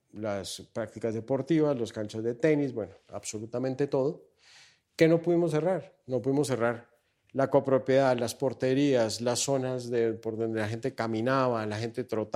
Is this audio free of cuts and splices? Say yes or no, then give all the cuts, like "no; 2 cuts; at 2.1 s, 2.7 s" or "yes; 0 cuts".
yes; 0 cuts